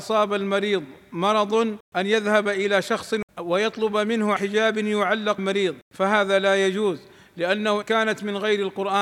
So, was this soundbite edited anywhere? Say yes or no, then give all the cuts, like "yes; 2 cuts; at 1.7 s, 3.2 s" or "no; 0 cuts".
yes; 6 cuts; at 1.8 s, 3.3 s, 4.4 s, 5.4 s, 5.8 s, 7.8 s